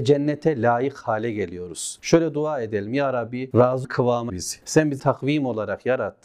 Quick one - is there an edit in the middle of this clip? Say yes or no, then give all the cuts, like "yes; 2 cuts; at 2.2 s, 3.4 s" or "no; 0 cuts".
yes; 3 cuts; at 3.8 s, 4.3 s, 5.0 s